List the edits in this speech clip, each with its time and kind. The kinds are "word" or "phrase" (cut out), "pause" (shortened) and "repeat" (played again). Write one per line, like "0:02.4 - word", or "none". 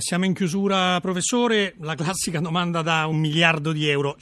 none